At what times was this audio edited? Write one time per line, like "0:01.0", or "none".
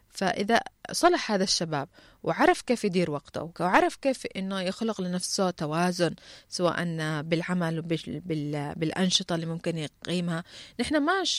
none

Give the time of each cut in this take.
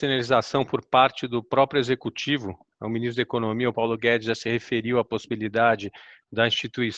none

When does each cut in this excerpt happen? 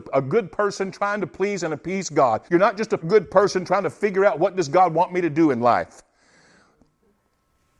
0:02.5
0:03.0

